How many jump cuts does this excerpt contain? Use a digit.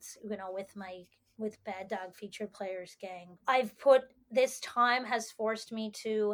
2